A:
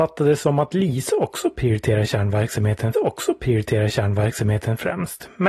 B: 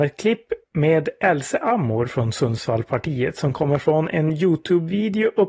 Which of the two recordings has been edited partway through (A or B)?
A